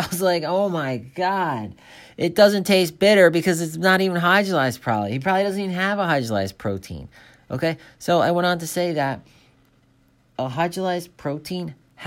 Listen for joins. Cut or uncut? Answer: uncut